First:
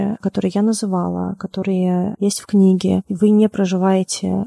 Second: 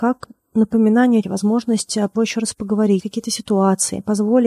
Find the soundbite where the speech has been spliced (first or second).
second